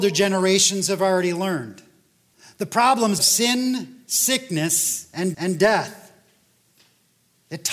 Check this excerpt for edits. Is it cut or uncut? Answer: cut